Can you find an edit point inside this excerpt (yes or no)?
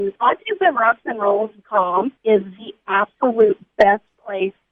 yes